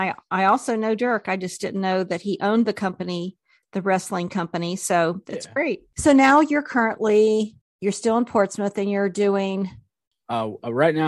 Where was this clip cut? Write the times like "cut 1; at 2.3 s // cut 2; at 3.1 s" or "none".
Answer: none